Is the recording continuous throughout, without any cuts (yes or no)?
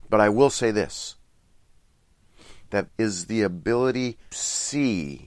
no